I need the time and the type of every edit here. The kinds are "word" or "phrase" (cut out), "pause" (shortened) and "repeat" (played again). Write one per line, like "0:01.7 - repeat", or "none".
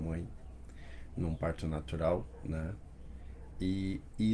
none